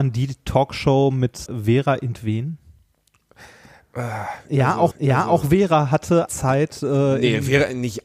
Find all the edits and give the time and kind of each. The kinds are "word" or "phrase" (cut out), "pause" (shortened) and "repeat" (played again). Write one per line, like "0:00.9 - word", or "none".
0:01.5 - word
0:04.9 - repeat
0:06.3 - word